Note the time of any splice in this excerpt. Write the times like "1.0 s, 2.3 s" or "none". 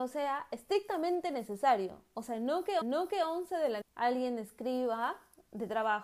2.8 s, 3.8 s